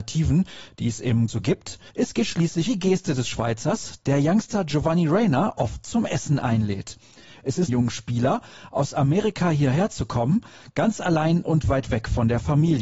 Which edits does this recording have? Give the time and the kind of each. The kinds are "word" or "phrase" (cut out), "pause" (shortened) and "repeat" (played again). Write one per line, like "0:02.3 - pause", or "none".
0:01.3 - phrase
0:01.9 - pause
0:02.7 - word
0:07.7 - phrase